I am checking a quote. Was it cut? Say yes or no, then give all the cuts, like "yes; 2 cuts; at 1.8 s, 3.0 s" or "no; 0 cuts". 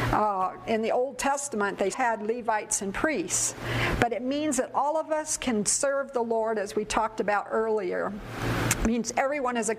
yes; 1 cut; at 1.9 s